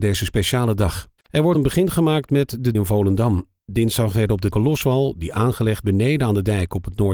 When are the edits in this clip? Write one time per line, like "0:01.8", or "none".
0:01.2
0:01.5
0:02.7
0:04.5
0:05.8